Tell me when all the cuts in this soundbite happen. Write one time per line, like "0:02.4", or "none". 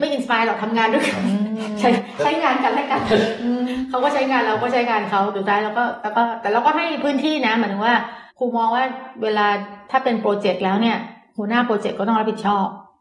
0:08.3